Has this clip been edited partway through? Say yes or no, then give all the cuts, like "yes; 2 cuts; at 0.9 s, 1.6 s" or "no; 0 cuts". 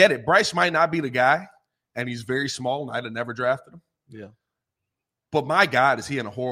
no; 0 cuts